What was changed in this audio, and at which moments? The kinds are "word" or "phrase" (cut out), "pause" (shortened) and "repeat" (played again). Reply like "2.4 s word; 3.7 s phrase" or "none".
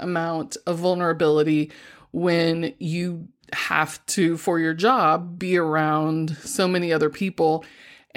none